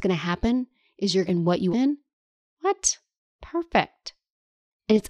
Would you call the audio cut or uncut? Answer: cut